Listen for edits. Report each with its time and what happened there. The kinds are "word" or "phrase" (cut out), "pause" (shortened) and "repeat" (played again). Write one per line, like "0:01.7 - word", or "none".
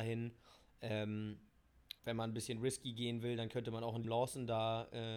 0:02.0 - pause
0:04.0 - word